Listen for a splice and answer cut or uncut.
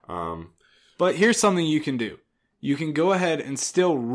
uncut